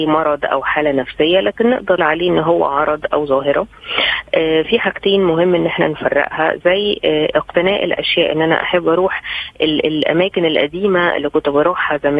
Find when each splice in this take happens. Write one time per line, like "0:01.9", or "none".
0:02.0